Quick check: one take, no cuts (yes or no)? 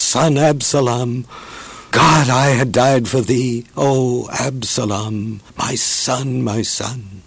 no